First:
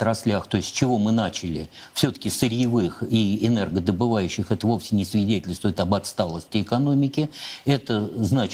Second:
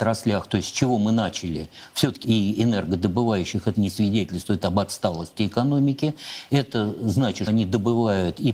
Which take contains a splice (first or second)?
second